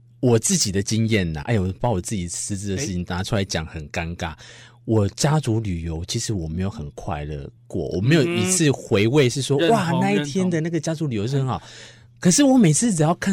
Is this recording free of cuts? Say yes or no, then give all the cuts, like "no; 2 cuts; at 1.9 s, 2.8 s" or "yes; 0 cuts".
no; 2 cuts; at 1.4 s, 7.6 s